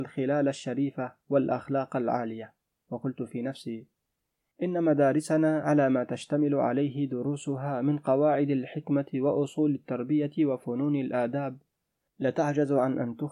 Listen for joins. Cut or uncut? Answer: uncut